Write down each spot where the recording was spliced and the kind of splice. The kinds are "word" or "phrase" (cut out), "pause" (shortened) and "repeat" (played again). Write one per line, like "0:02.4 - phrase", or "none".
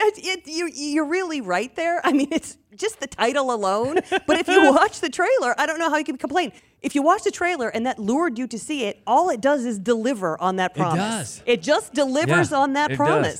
0:06.6 - pause

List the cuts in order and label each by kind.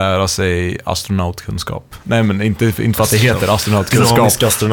none

